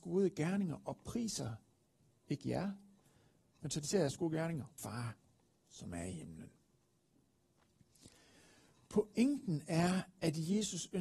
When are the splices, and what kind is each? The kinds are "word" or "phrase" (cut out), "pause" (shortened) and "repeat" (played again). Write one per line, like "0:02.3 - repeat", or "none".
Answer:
0:04.8 - phrase